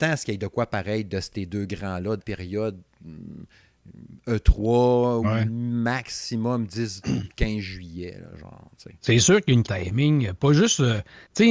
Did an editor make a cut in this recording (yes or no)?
yes